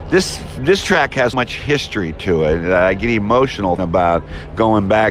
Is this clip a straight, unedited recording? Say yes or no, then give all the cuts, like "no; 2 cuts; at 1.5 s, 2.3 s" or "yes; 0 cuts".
no; 2 cuts; at 1.3 s, 3.8 s